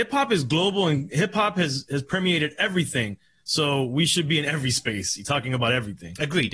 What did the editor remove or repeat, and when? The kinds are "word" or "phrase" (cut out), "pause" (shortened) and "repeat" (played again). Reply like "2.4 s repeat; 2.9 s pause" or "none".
none